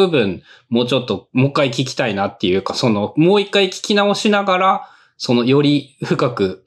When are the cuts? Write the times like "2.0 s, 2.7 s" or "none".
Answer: none